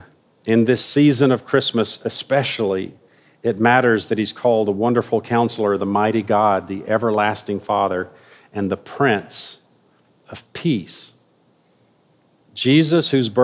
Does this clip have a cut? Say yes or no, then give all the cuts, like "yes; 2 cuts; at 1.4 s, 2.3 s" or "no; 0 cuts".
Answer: no; 0 cuts